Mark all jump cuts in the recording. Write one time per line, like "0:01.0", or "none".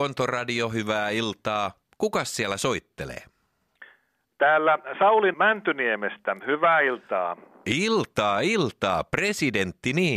0:05.3